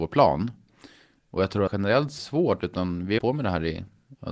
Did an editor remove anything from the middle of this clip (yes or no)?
yes